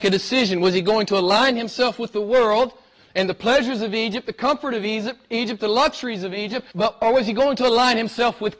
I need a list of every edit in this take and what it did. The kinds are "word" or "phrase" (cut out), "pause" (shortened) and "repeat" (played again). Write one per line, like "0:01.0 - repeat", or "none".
0:06.7 - pause